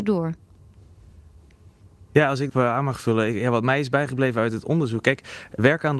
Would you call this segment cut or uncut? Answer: cut